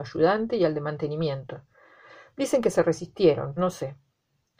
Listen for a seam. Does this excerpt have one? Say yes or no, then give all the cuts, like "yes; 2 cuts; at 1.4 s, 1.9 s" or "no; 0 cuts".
yes; 1 cut; at 3.6 s